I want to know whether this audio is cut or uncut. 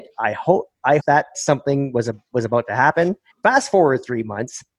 cut